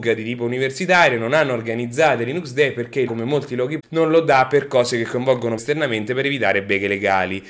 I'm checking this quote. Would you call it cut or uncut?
cut